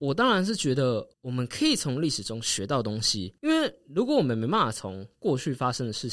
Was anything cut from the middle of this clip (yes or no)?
yes